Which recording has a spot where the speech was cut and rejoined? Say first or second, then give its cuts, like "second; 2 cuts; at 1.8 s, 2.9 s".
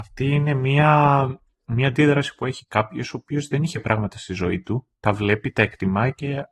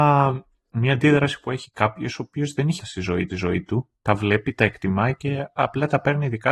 second; 2 cuts; at 2.8 s, 3.3 s